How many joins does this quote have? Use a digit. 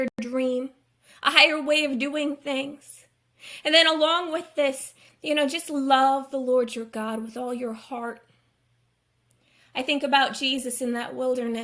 0